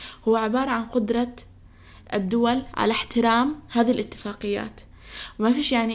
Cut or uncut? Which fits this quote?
uncut